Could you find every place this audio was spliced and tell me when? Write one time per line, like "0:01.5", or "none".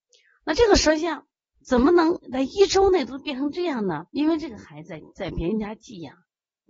0:04.1